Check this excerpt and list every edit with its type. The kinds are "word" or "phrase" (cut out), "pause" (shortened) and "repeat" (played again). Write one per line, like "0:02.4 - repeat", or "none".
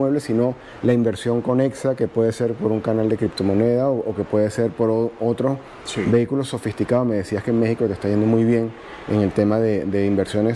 none